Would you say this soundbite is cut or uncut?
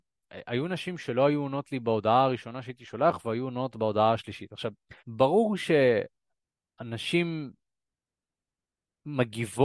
cut